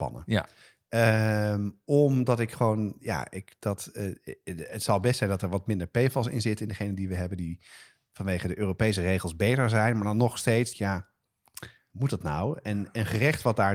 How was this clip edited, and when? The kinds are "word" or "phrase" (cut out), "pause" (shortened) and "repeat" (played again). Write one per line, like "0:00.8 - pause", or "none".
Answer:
0:10.7 - phrase